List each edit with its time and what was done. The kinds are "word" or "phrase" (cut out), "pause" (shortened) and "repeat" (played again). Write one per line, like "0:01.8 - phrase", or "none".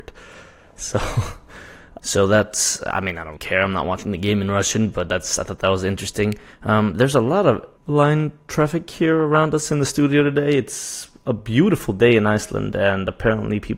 0:02.0 - word
0:03.4 - word
0:07.8 - word